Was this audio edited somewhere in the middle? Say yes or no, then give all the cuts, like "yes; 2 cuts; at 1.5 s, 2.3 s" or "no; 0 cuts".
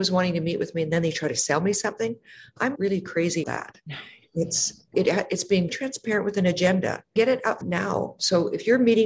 yes; 6 cuts; at 2.8 s, 3.4 s, 4.9 s, 5.7 s, 7.2 s, 7.6 s